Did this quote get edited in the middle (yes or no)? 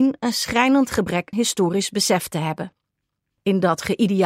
yes